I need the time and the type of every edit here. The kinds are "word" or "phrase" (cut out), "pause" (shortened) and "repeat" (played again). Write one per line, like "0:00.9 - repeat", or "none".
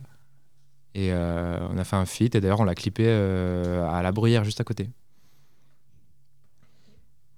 none